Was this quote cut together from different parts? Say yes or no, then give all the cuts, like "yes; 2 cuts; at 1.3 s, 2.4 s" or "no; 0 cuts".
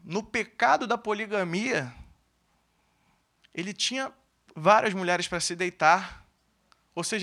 no; 0 cuts